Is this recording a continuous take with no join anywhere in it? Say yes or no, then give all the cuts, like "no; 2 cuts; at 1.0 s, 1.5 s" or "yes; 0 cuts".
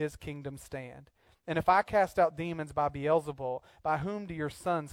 yes; 0 cuts